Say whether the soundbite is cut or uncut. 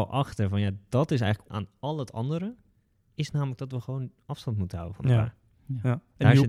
cut